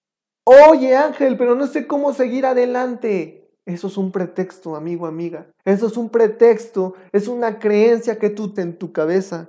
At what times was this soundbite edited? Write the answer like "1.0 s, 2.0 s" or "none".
5.6 s, 8.6 s